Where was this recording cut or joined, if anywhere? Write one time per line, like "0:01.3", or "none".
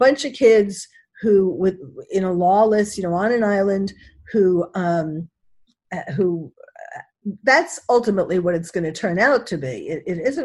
none